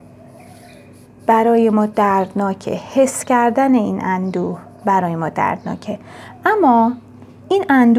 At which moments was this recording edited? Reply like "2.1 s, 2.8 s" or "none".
none